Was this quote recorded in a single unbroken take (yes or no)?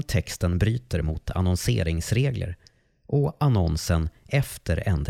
yes